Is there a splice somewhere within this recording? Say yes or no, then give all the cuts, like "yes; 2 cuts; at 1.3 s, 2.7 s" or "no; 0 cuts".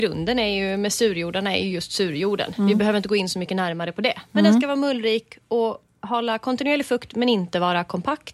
no; 0 cuts